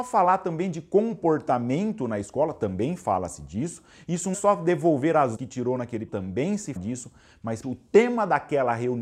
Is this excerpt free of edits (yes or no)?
no